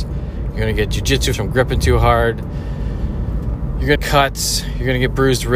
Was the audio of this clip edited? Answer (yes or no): yes